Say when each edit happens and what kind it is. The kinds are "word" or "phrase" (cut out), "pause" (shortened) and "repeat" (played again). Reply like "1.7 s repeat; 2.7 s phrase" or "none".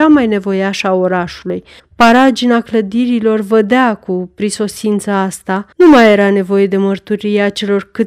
1.8 s pause; 5.7 s pause